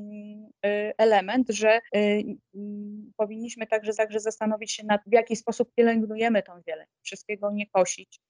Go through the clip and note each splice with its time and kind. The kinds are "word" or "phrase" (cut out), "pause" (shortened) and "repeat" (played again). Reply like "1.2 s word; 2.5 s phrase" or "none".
1.9 s pause; 3.9 s repeat; 5.1 s word; 7.0 s word